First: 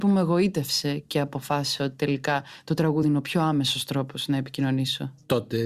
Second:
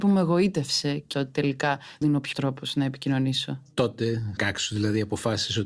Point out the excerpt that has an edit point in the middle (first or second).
second